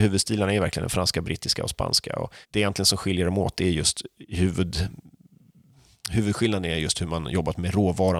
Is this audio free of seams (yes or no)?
no